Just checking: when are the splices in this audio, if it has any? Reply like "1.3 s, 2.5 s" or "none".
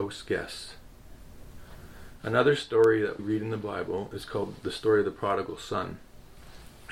3.2 s